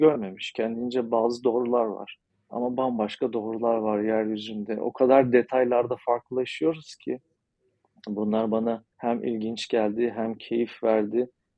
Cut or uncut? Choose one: cut